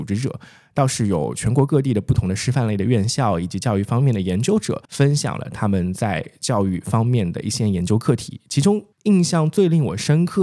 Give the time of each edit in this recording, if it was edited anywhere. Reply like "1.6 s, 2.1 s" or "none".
4.8 s, 8.9 s

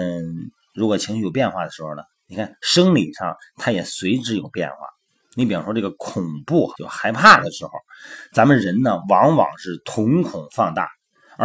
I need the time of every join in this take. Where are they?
6.7 s

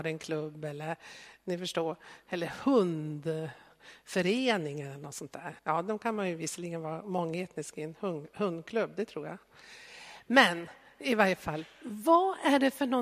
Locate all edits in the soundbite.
5.6 s

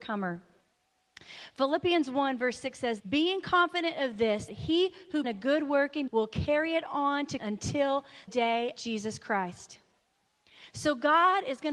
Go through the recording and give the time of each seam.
3.0 s, 4.5 s, 5.2 s, 6.1 s, 7.4 s, 8.3 s, 8.8 s

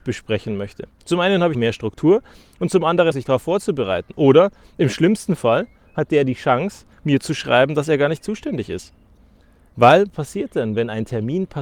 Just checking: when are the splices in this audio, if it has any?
1.5 s, 3.1 s, 10.1 s

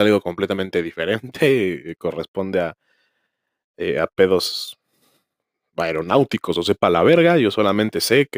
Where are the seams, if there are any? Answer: none

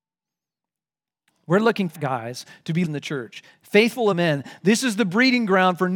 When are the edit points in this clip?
1.9 s, 2.8 s, 4.1 s

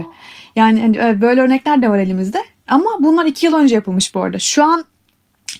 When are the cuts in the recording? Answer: none

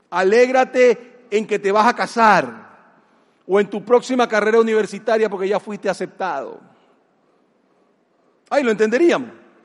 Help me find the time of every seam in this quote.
none

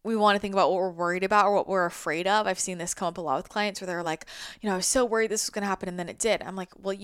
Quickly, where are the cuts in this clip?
none

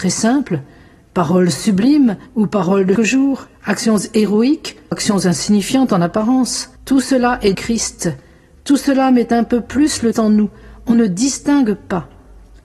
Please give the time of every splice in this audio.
2.3 s, 3.0 s, 3.5 s, 4.9 s, 6.8 s, 7.5 s, 10.1 s

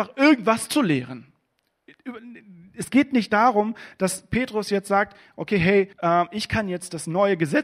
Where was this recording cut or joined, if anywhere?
5.9 s

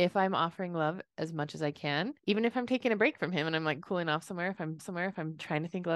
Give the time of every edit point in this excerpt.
2.2 s, 4.8 s

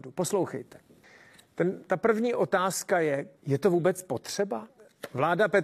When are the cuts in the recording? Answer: 3.4 s

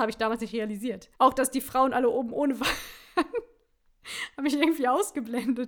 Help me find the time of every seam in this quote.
1.1 s

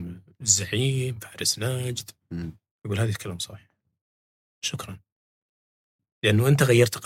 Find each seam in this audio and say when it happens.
none

